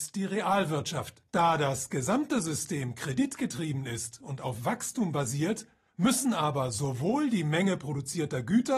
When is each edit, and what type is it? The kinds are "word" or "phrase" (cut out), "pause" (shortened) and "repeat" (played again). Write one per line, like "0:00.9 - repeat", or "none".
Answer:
0:01.3 - pause
0:05.9 - pause